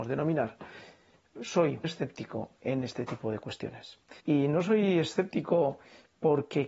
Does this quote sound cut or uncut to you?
cut